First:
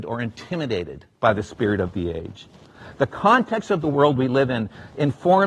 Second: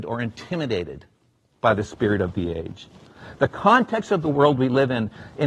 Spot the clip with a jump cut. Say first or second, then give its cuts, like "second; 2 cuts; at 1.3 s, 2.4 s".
first; 1 cut; at 1.1 s